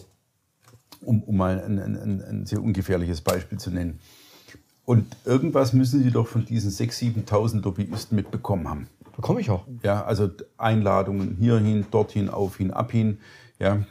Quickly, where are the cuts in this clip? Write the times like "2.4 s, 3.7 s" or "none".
none